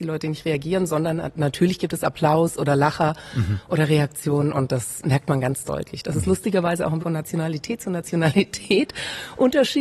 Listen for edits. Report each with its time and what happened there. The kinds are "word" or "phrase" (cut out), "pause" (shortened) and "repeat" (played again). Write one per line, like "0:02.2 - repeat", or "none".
0:07.0 - word